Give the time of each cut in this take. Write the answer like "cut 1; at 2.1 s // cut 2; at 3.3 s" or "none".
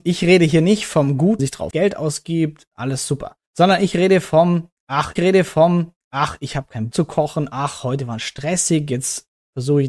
cut 1; at 1.4 s // cut 2; at 1.7 s // cut 3; at 3.5 s // cut 4; at 5.2 s // cut 5; at 6.9 s